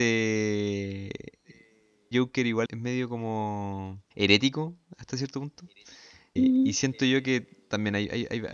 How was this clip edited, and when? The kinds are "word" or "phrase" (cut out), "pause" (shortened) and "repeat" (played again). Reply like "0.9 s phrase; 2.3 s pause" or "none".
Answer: 2.1 s word; 2.7 s word; 4.1 s pause; 6.4 s word